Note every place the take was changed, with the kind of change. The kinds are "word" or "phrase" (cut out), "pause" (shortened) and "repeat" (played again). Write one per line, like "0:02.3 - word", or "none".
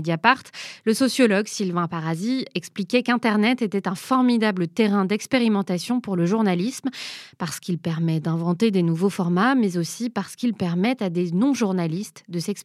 none